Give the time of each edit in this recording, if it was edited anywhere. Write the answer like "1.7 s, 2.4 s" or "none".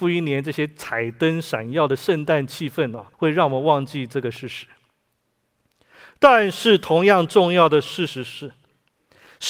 3.1 s